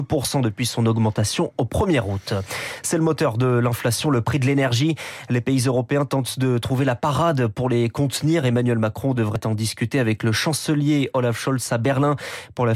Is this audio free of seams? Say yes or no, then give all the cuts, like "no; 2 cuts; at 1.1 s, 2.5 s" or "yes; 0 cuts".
yes; 0 cuts